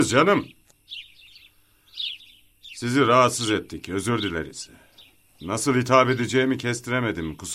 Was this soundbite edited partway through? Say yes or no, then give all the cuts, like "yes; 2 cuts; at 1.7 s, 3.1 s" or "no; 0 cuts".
no; 0 cuts